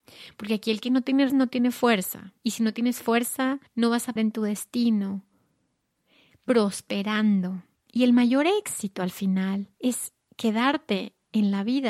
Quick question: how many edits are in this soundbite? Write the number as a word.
six